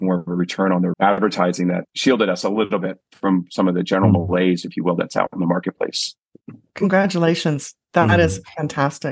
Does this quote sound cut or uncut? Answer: cut